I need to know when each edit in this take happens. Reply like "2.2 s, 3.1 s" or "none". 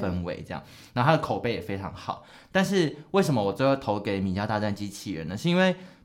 none